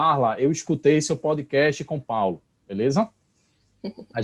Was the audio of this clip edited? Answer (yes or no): no